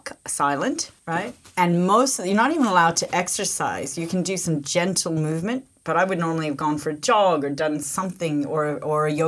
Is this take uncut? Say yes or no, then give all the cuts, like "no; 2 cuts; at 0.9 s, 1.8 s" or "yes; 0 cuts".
yes; 0 cuts